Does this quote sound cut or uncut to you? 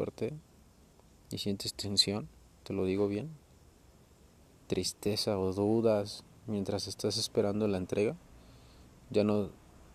uncut